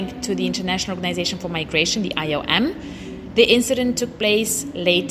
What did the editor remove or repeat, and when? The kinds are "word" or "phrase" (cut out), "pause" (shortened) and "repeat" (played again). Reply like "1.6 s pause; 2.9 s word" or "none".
none

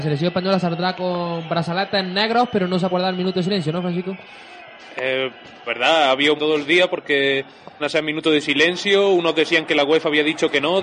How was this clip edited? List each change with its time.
2.9 s word; 5.7 s word; 6.4 s phrase; 7.8 s phrase

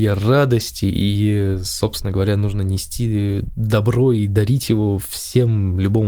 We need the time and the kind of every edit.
none

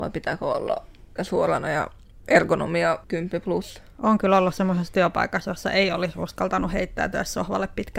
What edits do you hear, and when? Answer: 1.2 s word; 3.0 s pause

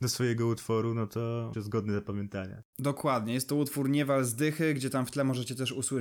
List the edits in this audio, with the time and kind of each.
1.5 s word

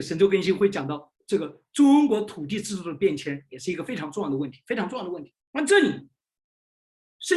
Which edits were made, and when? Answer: 1.2 s pause; 5.4 s pause

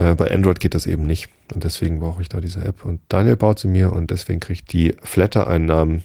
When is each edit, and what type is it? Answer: 4.6 s word

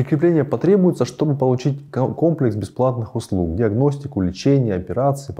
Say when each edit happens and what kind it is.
none

